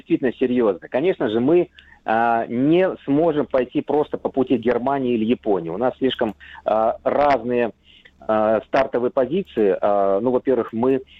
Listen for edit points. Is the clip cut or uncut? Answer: uncut